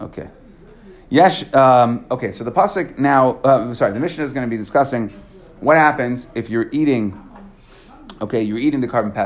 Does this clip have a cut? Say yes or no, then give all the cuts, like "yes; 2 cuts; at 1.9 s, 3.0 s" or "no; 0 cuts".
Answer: no; 0 cuts